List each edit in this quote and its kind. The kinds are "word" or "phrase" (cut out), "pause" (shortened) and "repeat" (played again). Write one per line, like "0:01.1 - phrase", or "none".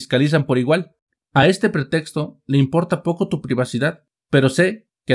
none